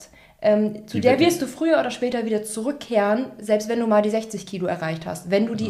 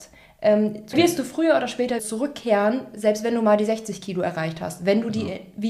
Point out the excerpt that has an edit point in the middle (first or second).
second